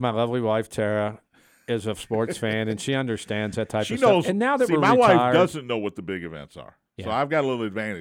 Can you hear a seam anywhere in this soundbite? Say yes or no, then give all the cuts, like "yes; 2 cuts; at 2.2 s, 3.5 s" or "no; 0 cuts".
no; 0 cuts